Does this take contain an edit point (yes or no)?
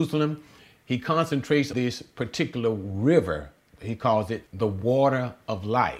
yes